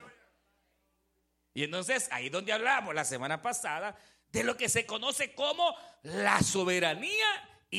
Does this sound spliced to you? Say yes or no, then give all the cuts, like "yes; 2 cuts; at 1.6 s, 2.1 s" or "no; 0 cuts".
no; 0 cuts